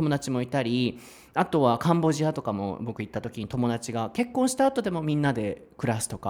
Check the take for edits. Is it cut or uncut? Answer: uncut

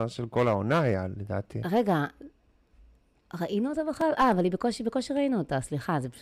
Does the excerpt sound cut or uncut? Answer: uncut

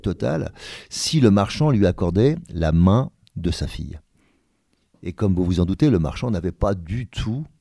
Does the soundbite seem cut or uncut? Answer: uncut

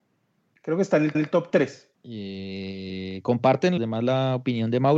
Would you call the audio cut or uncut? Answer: cut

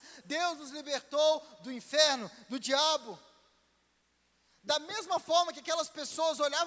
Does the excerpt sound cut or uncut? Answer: uncut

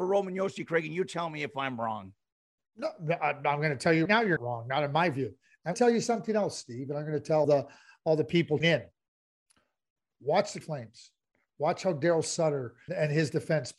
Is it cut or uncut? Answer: cut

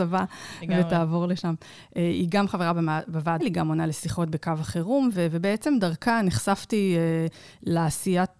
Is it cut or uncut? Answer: cut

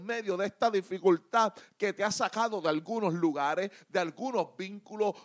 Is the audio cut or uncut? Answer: uncut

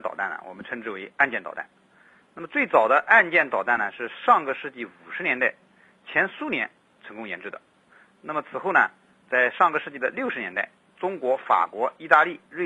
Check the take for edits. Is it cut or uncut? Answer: uncut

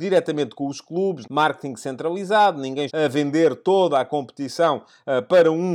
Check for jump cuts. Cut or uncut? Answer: cut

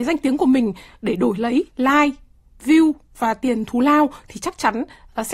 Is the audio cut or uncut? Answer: cut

